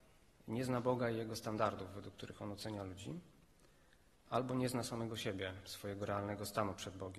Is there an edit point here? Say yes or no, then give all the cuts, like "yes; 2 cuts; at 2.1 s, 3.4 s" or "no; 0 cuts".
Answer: no; 0 cuts